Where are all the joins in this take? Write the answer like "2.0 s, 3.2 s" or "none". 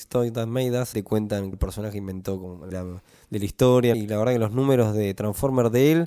0.9 s, 1.5 s, 2.7 s, 3.9 s